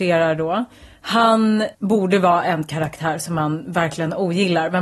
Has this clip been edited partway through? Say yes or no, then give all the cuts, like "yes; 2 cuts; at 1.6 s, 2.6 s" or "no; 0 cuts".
yes; 1 cut; at 1.7 s